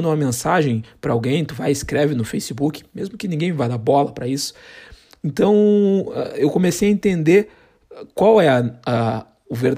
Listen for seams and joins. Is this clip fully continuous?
yes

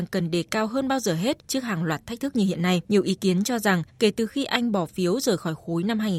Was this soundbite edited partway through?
yes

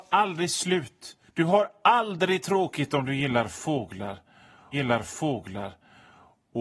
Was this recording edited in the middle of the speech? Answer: yes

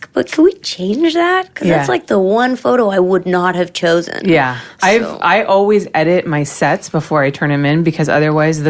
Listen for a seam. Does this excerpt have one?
no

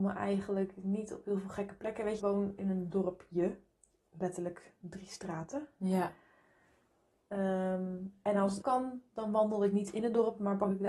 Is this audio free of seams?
no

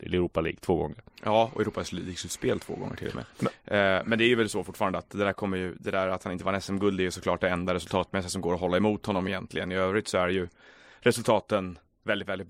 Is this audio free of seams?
yes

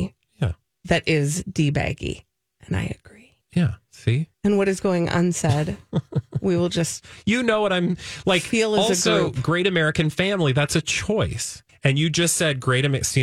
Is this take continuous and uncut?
no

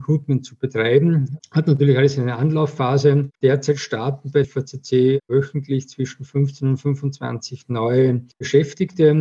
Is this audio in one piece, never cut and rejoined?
no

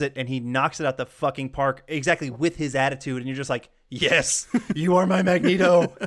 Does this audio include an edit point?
no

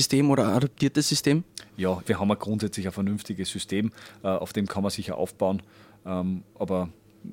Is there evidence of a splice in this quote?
yes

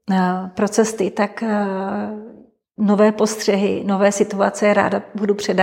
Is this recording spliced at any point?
no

